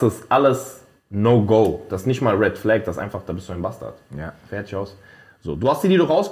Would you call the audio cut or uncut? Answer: uncut